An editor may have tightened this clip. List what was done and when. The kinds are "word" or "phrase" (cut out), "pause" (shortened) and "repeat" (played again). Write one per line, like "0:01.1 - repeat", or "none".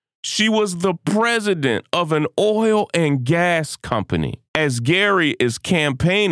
0:04.5 - pause